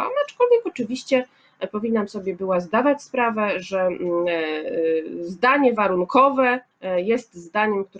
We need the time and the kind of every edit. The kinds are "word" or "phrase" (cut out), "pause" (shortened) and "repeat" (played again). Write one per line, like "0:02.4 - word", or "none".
0:06.7 - pause